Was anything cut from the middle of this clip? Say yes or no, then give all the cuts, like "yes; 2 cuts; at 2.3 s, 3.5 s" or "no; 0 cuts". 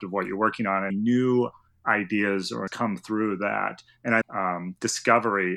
yes; 3 cuts; at 0.9 s, 2.7 s, 4.2 s